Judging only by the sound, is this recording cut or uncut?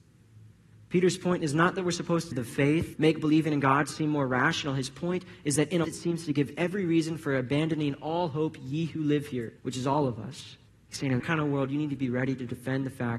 cut